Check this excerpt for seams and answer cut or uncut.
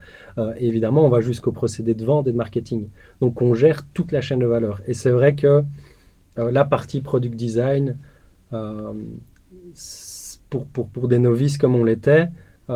uncut